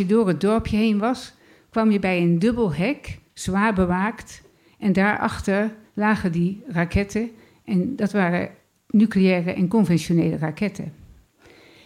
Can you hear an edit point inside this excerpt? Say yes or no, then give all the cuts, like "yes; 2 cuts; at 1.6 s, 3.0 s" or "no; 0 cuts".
no; 0 cuts